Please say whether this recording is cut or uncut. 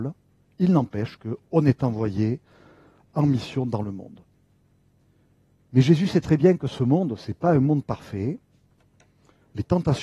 uncut